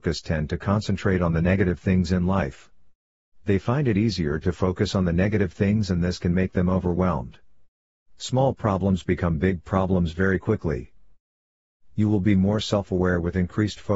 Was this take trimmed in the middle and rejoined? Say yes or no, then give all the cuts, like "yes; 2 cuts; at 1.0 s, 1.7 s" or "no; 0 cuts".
no; 0 cuts